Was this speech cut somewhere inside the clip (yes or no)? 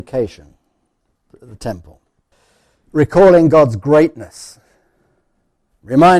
yes